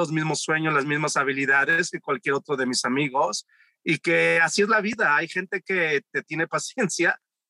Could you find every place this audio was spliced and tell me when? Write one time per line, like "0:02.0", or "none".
none